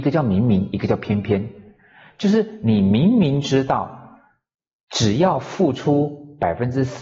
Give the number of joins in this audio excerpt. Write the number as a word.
zero